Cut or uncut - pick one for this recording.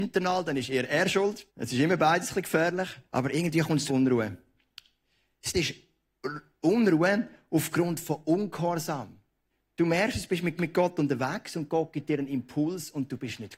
cut